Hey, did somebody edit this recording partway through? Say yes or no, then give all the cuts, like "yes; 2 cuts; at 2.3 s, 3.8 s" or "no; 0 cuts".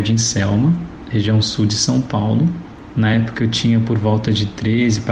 no; 0 cuts